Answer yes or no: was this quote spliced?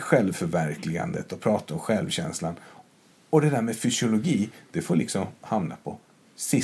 no